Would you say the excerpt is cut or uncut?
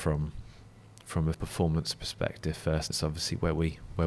cut